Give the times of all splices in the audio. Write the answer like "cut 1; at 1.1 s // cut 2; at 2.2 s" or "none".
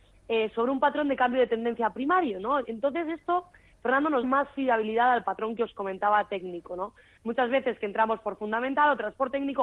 cut 1; at 4.2 s